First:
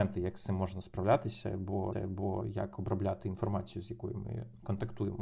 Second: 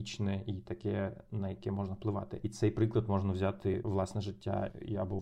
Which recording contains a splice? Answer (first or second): first